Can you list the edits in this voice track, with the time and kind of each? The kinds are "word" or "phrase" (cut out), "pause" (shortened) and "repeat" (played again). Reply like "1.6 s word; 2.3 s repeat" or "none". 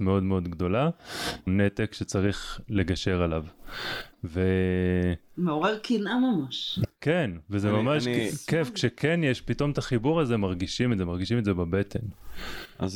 1.5 s word